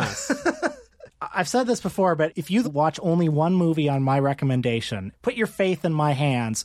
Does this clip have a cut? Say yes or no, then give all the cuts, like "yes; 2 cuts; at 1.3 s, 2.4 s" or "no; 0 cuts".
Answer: yes; 1 cut; at 2.6 s